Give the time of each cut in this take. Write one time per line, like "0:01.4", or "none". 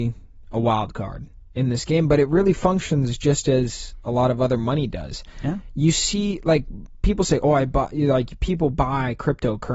none